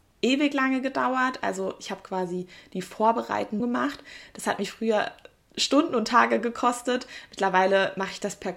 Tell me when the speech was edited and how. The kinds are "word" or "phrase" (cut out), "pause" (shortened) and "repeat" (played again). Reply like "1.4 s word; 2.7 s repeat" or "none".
3.6 s word